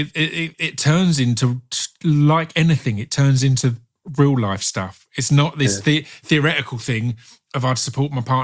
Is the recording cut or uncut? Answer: uncut